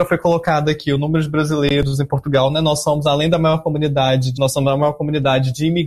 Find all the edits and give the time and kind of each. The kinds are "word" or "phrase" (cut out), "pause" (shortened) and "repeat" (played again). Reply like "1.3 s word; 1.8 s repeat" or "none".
4.4 s word